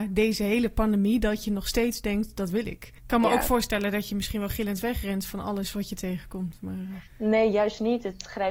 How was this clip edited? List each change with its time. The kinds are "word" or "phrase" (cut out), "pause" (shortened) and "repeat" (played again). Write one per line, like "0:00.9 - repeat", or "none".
0:03.0 - pause
0:07.1 - pause